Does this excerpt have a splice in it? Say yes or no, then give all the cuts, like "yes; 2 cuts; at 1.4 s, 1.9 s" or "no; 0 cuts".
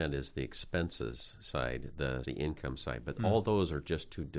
yes; 1 cut; at 2.2 s